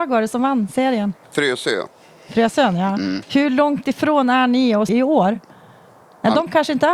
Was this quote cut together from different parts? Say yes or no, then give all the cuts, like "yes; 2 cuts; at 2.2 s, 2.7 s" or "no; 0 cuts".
yes; 2 cuts; at 1.2 s, 4.9 s